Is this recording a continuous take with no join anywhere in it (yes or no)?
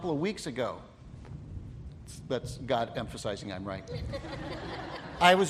yes